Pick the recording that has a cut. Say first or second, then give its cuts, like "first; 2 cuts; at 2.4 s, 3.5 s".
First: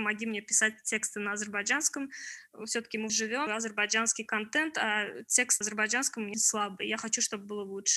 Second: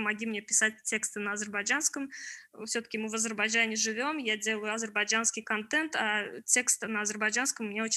first; 4 cuts; at 3.1 s, 3.5 s, 5.6 s, 6.3 s